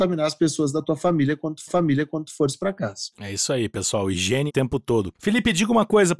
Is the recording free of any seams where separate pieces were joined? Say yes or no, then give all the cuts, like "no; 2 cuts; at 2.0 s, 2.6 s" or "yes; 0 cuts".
no; 4 cuts; at 1.7 s, 3.1 s, 4.5 s, 5.1 s